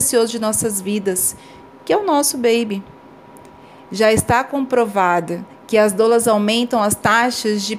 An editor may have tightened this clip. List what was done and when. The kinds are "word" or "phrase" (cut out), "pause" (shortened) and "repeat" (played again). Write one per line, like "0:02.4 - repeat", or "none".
none